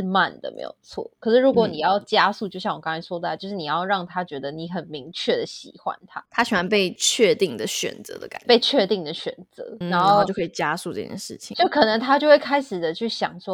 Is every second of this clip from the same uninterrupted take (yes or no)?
no